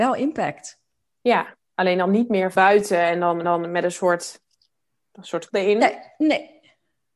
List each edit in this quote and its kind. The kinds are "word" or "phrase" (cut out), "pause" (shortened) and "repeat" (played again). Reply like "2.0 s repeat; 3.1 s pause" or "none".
2.5 s word; 3.4 s repeat; 5.5 s word